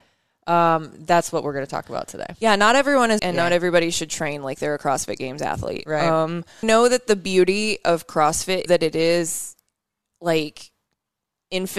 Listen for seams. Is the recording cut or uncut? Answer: cut